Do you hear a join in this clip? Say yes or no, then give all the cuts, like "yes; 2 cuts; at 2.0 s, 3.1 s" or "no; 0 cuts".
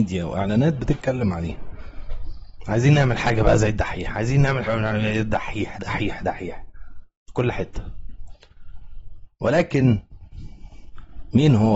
yes; 2 cuts; at 4.7 s, 5.7 s